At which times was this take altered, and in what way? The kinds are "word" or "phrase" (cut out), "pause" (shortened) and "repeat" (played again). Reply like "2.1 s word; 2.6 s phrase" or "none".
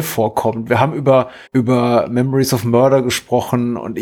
1.5 s pause